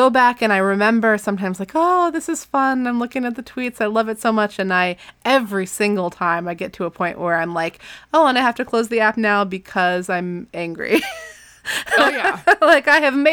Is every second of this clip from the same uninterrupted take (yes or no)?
yes